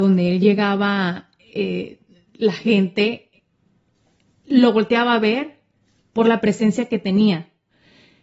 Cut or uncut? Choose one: uncut